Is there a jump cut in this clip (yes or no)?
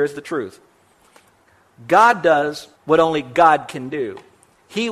yes